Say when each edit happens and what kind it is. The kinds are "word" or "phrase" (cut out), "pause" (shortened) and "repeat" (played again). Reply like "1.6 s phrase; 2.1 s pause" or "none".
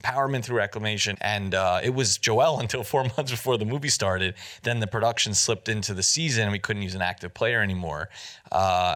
1.1 s word